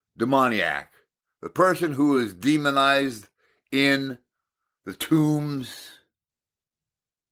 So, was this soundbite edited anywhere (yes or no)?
no